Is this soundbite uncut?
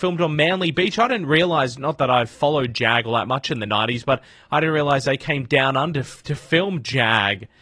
yes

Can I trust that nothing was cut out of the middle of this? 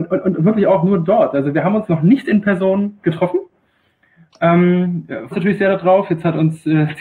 no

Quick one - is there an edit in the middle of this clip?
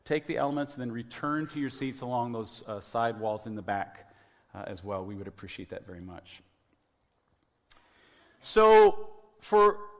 no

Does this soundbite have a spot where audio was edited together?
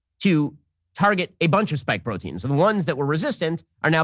no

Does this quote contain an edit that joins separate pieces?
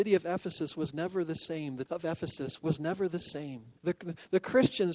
yes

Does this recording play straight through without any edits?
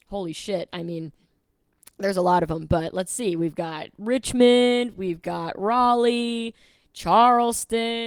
yes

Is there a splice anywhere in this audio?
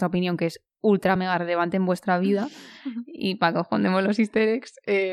no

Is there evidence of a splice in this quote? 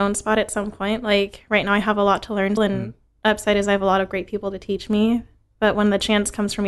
yes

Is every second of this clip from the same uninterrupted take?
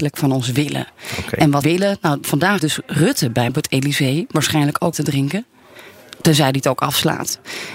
no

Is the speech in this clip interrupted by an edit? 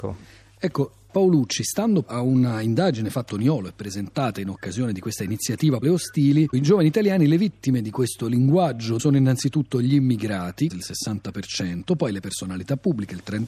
yes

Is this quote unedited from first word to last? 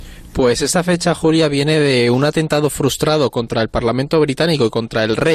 yes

